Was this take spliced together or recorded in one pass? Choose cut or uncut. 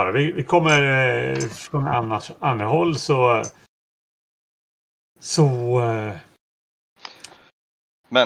uncut